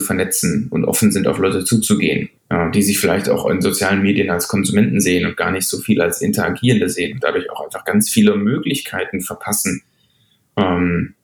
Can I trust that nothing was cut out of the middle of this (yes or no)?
no